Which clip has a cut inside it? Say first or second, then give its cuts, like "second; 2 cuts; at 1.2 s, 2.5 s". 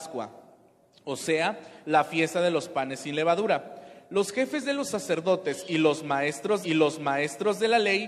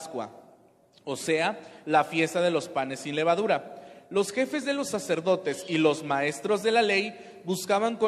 first; 1 cut; at 6.6 s